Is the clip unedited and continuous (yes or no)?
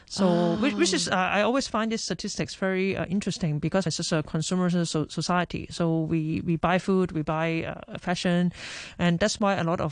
no